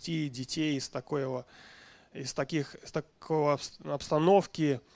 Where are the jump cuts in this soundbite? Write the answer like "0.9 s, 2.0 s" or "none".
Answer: none